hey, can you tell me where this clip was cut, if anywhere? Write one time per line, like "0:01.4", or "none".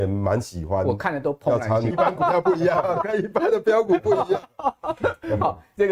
0:01.9